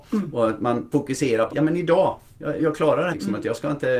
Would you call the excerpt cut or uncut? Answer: cut